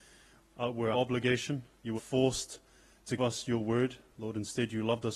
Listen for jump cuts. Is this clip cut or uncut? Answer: cut